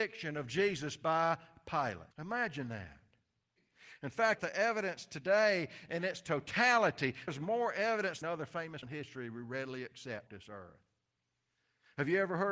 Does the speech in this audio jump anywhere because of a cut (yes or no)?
yes